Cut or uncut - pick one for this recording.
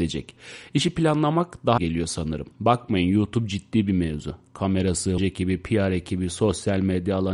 cut